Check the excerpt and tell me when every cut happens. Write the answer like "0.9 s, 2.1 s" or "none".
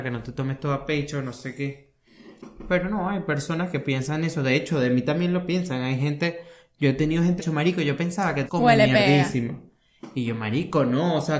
3.7 s, 7.4 s, 8.5 s

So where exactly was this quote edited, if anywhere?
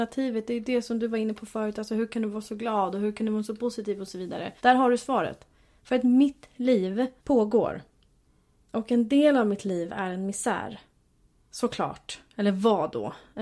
4.6 s, 7.2 s

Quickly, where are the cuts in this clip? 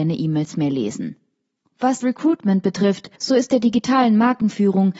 2.0 s, 3.2 s

